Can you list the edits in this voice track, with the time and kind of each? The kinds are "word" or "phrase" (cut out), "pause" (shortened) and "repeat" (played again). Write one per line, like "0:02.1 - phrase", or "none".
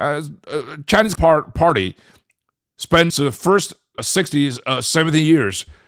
0:01.1 - word
0:03.1 - word
0:04.0 - word